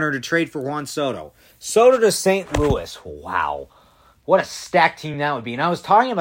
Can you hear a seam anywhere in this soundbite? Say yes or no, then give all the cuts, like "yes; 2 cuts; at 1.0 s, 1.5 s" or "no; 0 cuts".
no; 0 cuts